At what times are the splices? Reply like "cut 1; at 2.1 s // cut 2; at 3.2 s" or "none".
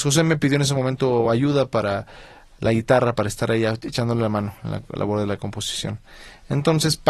none